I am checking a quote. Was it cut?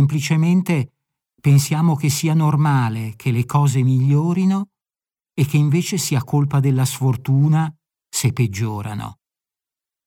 no; 0 cuts

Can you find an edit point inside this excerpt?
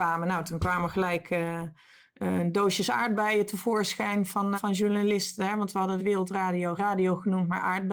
yes; 3 cuts; at 4.5 s, 6.0 s, 6.8 s

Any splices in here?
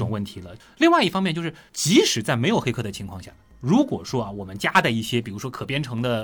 no; 0 cuts

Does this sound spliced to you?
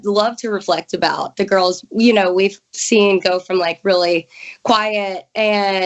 no; 0 cuts

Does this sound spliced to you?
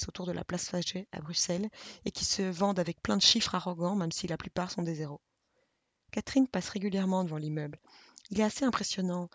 no; 0 cuts

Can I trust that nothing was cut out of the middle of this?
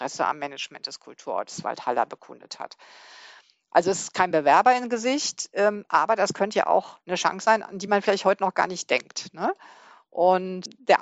yes; 0 cuts

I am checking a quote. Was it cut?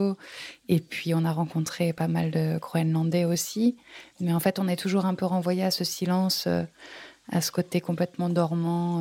no; 0 cuts

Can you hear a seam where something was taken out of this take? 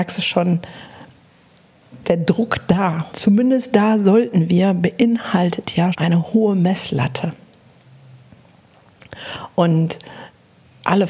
yes; 3 cuts; at 2.0 s, 3.1 s, 5.9 s

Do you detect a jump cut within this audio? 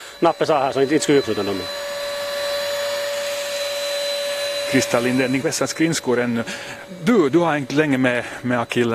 yes; 2 cuts; at 1.2 s, 5.4 s

